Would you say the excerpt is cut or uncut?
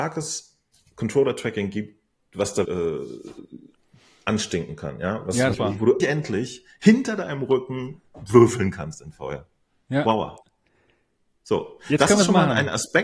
cut